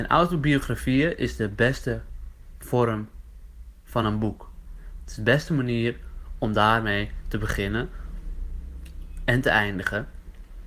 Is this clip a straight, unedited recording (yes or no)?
yes